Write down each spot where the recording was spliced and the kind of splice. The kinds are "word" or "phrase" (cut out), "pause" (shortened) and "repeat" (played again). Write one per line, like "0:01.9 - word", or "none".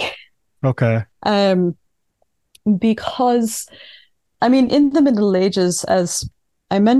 none